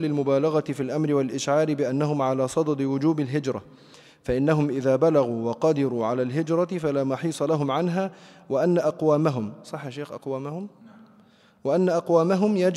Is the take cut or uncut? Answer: uncut